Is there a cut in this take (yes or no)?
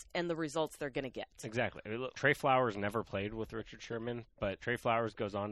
yes